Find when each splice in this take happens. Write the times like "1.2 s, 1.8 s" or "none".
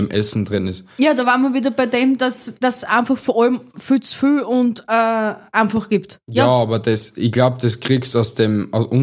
none